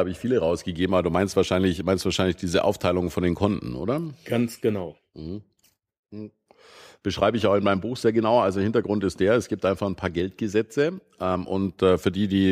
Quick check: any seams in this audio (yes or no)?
no